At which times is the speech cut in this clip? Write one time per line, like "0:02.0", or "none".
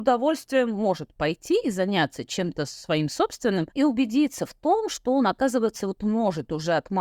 0:03.7